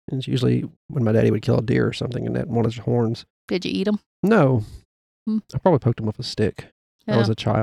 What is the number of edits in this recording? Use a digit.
0